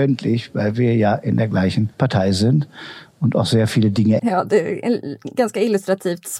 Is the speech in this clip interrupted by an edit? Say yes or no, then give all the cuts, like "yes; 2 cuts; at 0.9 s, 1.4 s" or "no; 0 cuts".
yes; 2 cuts; at 1.9 s, 4.2 s